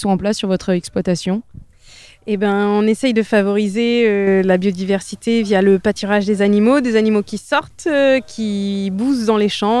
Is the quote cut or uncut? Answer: uncut